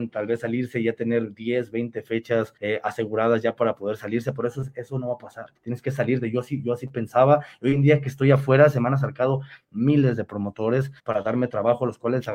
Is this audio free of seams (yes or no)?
no